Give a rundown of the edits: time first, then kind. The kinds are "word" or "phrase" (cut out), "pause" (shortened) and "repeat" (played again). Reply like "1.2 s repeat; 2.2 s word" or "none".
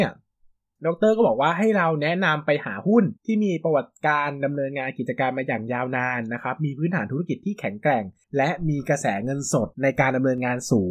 3.2 s pause; 9.7 s pause